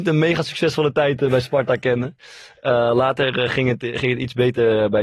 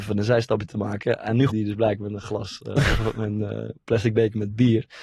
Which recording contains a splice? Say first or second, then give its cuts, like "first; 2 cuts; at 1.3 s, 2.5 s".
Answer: second; 1 cut; at 1.5 s